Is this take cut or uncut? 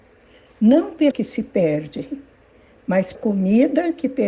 cut